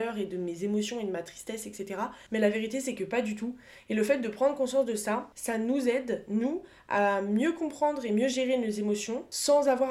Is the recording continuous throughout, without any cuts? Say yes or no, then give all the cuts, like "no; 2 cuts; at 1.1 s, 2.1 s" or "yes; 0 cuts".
yes; 0 cuts